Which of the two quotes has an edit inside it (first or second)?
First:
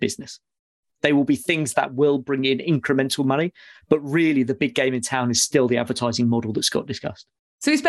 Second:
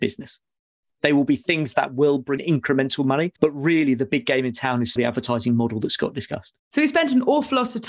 second